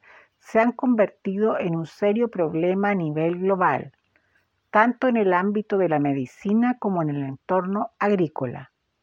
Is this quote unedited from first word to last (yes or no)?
yes